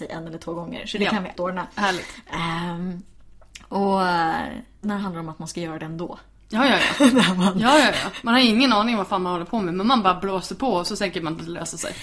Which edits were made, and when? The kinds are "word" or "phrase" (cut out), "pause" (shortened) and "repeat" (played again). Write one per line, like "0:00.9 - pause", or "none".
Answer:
0:01.3 - word
0:04.8 - word